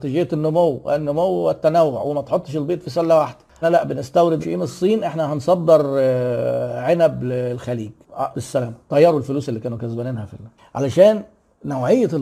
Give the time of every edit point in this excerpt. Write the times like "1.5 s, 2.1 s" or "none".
3.6 s, 4.4 s, 8.3 s

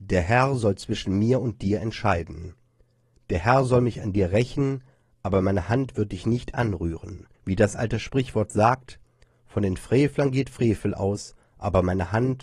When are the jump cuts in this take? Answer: 7.3 s

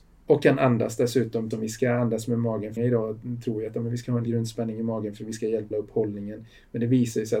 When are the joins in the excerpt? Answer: 1.5 s, 2.8 s, 4.3 s, 5.7 s

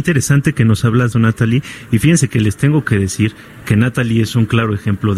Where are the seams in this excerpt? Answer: 1.1 s

